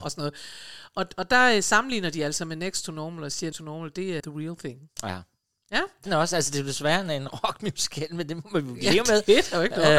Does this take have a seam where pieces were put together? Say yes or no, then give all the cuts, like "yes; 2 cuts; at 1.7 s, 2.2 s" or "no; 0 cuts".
yes; 3 cuts; at 3.5 s, 4.2 s, 6.1 s